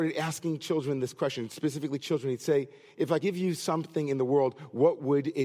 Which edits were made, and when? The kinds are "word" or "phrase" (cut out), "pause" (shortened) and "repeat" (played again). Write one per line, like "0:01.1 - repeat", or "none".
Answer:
0:03.2 - word